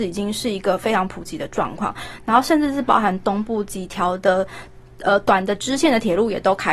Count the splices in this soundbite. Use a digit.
0